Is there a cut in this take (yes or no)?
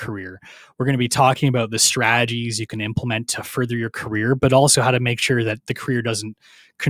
no